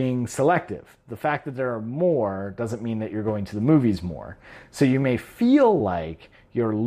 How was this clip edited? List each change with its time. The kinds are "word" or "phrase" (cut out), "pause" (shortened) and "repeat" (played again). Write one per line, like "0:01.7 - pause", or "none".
none